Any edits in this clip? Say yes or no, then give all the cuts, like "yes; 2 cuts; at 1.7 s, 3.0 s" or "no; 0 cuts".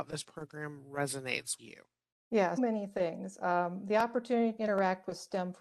yes; 3 cuts; at 1.6 s, 2.6 s, 4.6 s